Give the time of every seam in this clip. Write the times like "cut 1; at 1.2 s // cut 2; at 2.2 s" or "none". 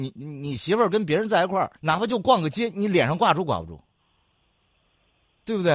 cut 1; at 1.8 s